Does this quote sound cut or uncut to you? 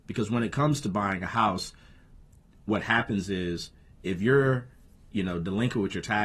uncut